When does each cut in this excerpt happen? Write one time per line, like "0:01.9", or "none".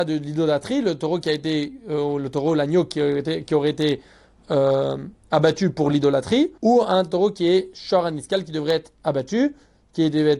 0:06.6